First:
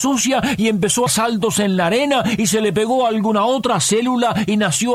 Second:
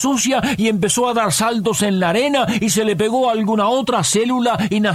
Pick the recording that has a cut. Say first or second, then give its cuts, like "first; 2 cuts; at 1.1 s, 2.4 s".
first; 1 cut; at 1.1 s